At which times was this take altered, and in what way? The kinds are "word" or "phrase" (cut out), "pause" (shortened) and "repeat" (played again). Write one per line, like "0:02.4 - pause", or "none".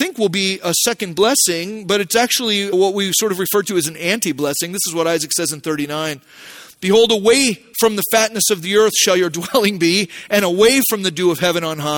0:02.7 - word